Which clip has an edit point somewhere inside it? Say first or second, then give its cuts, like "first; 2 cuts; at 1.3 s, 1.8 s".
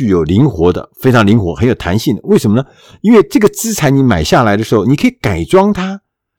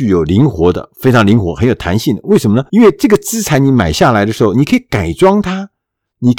second; 1 cut; at 2.7 s